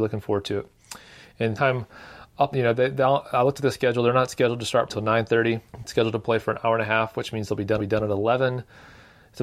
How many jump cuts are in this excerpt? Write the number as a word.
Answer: five